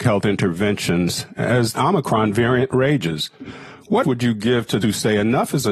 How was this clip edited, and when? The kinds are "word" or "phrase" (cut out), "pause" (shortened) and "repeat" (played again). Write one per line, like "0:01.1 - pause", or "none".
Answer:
0:01.7 - word
0:04.0 - word
0:04.8 - word